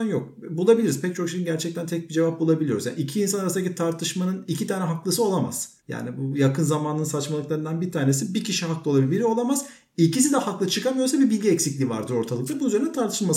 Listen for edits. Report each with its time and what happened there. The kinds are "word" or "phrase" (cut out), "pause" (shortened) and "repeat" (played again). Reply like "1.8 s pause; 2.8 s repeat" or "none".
5.8 s pause